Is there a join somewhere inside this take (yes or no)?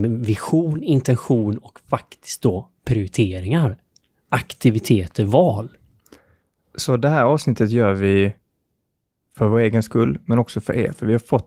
no